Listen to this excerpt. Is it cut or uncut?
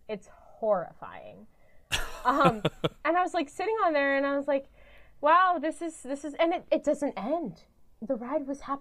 uncut